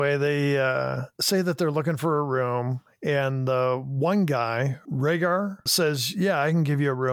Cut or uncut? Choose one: uncut